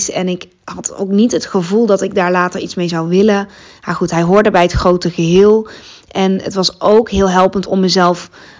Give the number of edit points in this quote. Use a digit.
0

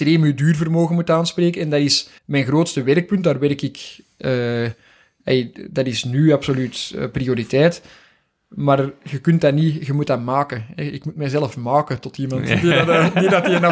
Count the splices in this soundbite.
1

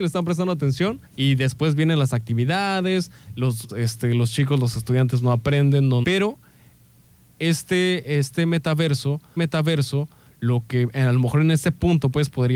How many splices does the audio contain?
4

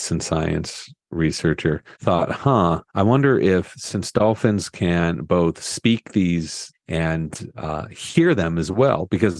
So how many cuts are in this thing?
3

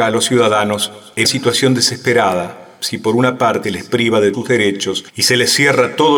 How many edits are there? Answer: 4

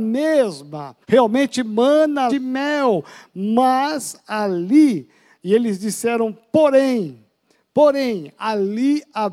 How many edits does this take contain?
2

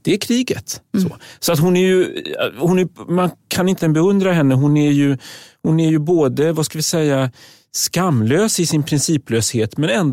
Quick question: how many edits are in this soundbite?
1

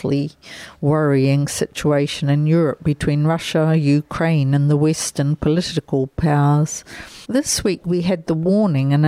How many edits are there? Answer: 1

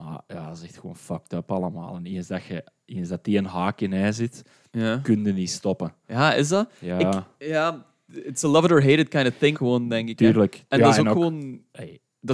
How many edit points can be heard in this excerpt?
1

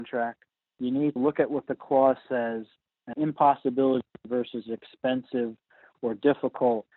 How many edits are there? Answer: 2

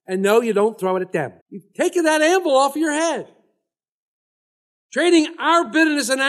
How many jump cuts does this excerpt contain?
1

